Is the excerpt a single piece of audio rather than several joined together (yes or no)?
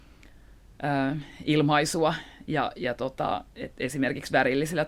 yes